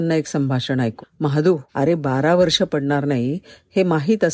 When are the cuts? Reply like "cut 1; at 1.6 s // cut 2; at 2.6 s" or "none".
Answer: cut 1; at 1.0 s // cut 2; at 1.7 s // cut 3; at 2.7 s

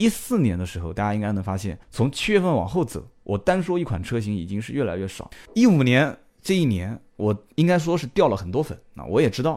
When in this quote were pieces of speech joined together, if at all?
cut 1; at 1.8 s // cut 2; at 5.5 s

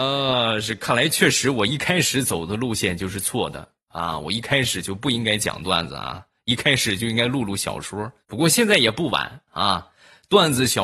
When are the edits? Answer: cut 1; at 8.2 s

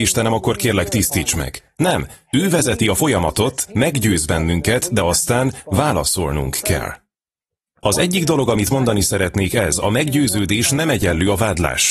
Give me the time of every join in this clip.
none

